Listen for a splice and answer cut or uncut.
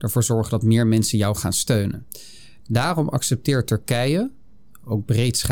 uncut